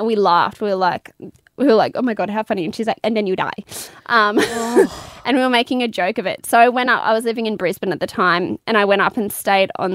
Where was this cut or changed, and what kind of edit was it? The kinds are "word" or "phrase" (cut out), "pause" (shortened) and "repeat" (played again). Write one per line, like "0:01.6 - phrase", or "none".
none